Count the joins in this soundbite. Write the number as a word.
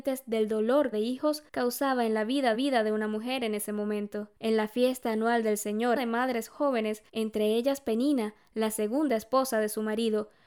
six